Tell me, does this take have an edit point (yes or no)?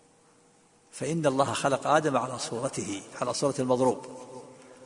no